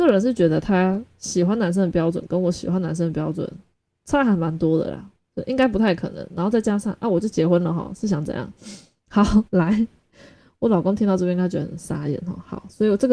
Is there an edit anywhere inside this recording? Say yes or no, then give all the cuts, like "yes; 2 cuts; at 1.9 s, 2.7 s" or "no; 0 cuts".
yes; 1 cut; at 9.5 s